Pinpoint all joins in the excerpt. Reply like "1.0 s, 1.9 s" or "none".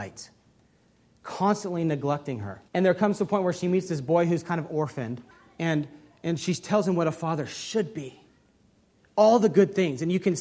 2.7 s, 5.3 s